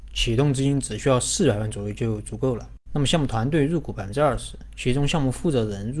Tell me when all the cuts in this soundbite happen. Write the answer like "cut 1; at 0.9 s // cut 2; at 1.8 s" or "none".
cut 1; at 2.8 s